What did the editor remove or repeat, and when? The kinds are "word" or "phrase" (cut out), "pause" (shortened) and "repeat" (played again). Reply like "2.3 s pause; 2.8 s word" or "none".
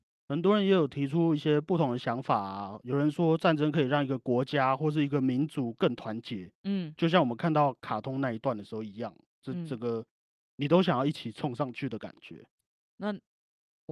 none